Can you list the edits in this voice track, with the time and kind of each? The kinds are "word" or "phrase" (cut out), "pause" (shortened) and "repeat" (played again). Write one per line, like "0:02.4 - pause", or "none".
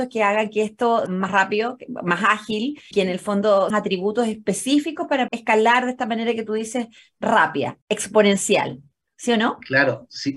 0:01.1 - word
0:02.9 - word
0:03.7 - phrase
0:05.3 - word
0:07.8 - pause

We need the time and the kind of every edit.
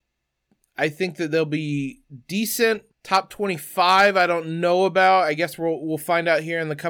0:02.9 - pause

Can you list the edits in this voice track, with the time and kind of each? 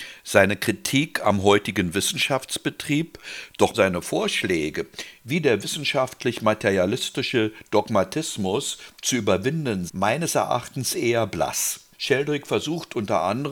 0:03.7 - word
0:09.9 - word
0:11.9 - pause

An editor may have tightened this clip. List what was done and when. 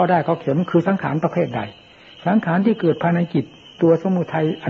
none

